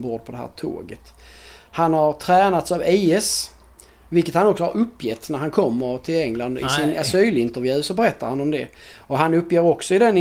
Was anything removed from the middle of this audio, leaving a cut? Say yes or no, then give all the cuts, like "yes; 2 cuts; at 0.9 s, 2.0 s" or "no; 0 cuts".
no; 0 cuts